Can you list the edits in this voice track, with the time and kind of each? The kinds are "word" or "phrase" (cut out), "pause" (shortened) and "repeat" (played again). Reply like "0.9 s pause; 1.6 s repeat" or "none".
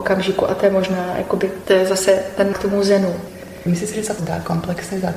2.5 s word; 4.2 s word